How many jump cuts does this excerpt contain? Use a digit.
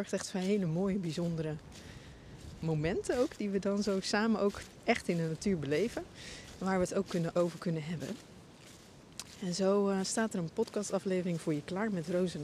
1